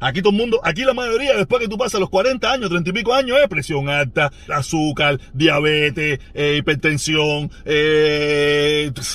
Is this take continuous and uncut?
no; 1 cut; at 4.5 s

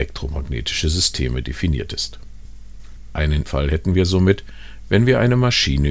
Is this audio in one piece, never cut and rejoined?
no; 1 cut; at 3.5 s

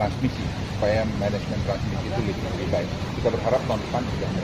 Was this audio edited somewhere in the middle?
yes; 1 cut; at 2.4 s

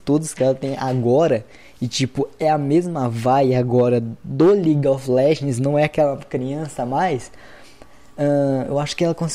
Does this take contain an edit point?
no; 0 cuts

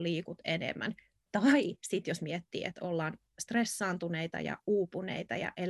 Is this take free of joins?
yes; 0 cuts

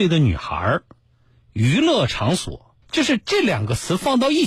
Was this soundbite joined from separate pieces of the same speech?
yes; 1 cut; at 2.8 s

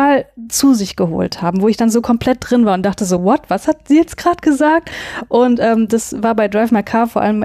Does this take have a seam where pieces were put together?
no; 0 cuts

